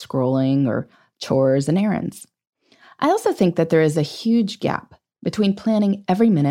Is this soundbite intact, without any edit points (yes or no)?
yes